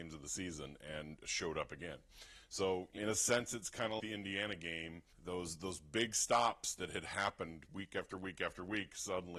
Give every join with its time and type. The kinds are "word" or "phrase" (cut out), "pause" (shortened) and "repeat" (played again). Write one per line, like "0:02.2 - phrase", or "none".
0:03.0 - word
0:04.0 - word
0:05.1 - pause